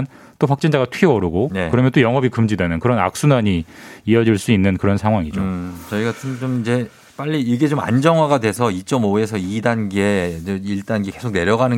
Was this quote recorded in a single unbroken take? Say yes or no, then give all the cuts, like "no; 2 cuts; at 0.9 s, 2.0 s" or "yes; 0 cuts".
yes; 0 cuts